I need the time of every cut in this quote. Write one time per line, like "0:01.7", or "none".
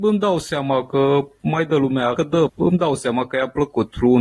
0:02.2
0:02.5